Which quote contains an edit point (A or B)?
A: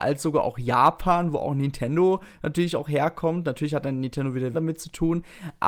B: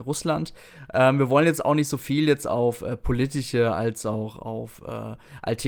A